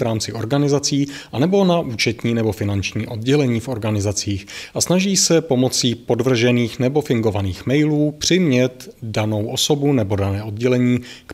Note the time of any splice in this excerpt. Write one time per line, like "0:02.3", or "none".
none